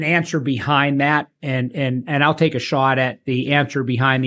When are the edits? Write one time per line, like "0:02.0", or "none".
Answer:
none